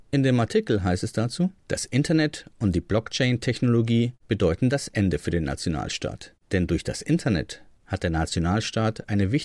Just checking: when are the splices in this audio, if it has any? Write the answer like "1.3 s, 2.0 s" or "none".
1.6 s